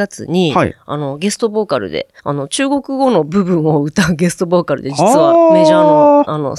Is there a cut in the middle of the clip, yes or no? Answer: yes